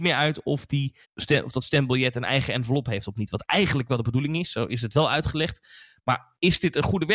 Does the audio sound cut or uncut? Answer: cut